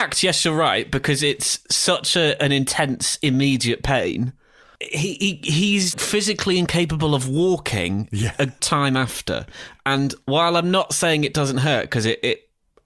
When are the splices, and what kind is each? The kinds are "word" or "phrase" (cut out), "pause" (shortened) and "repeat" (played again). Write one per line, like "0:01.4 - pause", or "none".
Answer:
0:04.6 - pause
0:05.9 - word
0:08.6 - word